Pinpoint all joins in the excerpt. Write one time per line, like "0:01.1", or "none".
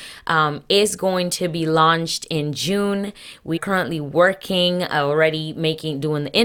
0:03.6